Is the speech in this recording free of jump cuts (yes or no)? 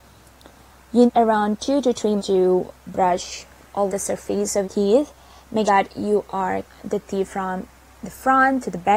no